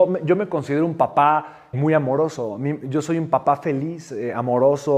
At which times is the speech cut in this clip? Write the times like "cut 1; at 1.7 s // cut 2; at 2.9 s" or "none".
cut 1; at 1.7 s